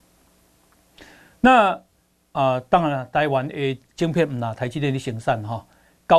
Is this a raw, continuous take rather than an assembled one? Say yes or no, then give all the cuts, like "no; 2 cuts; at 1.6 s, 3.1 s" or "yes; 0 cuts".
yes; 0 cuts